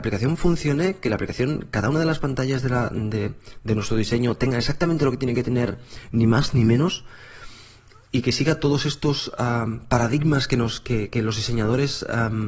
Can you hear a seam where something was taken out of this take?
no; 0 cuts

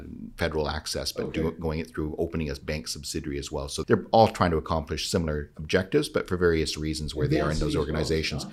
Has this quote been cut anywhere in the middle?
yes; 1 cut; at 3.8 s

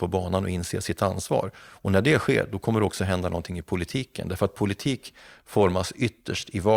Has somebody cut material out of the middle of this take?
no; 0 cuts

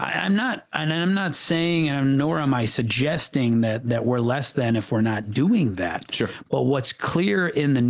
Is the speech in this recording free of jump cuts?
yes; 0 cuts

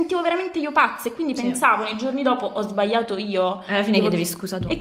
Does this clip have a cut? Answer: no; 0 cuts

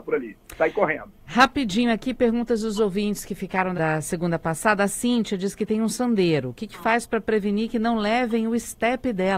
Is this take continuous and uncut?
no; 2 cuts; at 1.1 s, 3.7 s

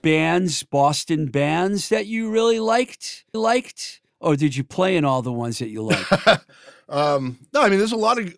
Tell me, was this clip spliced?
yes; 1 cut; at 3.3 s

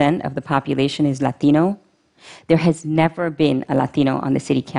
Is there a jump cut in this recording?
no; 0 cuts

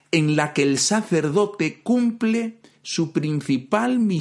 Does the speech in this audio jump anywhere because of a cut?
no; 0 cuts

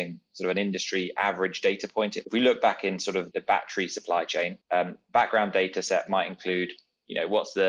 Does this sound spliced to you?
yes; 3 cuts; at 2.2 s, 3.3 s, 4.6 s

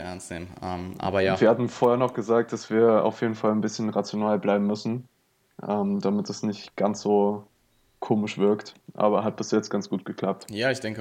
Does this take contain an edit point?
no; 0 cuts

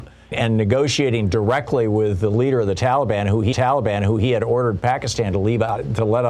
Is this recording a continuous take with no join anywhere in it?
no; 1 cut; at 3.5 s

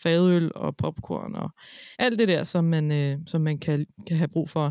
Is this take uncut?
no; 1 cut; at 1.9 s

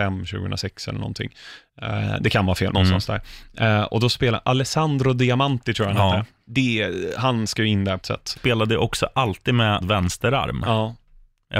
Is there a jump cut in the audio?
yes; 4 cuts; at 2.7 s, 8.0 s, 8.4 s, 9.8 s

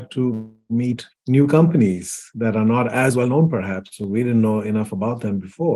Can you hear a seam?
yes; 1 cut; at 1.1 s

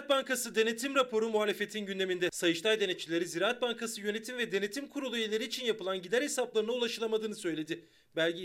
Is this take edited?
no; 0 cuts

